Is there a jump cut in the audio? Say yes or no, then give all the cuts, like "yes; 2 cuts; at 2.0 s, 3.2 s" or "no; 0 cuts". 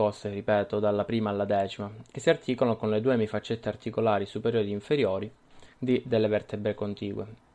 yes; 1 cut; at 5.7 s